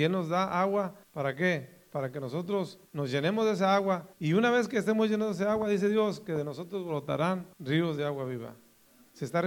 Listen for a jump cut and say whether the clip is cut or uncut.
cut